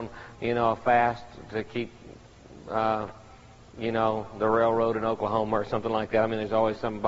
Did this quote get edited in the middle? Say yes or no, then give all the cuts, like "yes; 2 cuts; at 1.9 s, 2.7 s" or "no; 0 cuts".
no; 0 cuts